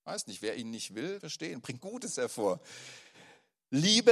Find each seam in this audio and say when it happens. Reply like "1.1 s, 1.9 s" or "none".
1.2 s, 1.8 s